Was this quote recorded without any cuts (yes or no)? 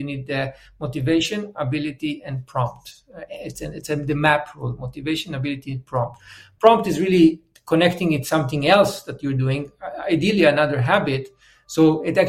yes